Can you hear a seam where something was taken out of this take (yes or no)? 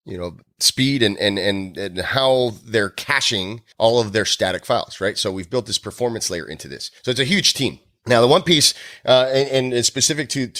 yes